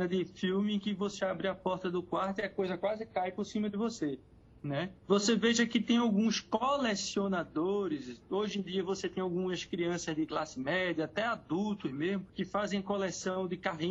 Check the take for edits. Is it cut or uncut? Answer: cut